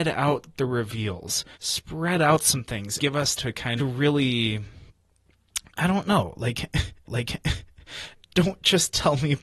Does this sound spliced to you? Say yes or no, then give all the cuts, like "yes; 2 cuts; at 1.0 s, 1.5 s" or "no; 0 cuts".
yes; 5 cuts; at 1.5 s, 3.0 s, 3.4 s, 3.8 s, 7.0 s